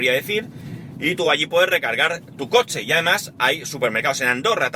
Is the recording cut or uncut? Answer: uncut